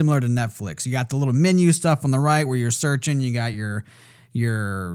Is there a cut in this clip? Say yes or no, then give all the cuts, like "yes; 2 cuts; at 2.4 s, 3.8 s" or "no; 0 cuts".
no; 0 cuts